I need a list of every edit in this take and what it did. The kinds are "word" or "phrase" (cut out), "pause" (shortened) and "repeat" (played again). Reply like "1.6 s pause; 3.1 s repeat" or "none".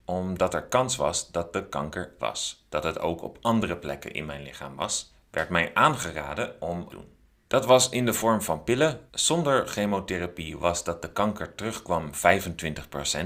2.2 s word; 6.9 s phrase; 9.1 s pause; 10.8 s phrase